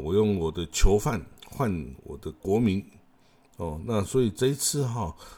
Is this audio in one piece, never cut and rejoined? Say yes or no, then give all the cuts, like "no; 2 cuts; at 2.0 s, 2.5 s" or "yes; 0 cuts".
yes; 0 cuts